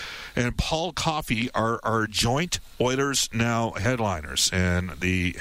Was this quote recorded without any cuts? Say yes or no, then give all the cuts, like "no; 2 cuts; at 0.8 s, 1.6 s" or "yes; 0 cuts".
yes; 0 cuts